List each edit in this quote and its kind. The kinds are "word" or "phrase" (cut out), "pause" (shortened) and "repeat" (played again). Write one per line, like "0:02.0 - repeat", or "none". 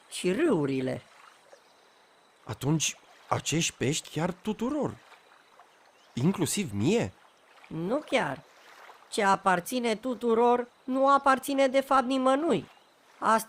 0:04.0 - word